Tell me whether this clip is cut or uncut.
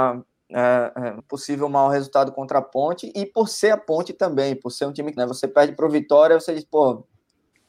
cut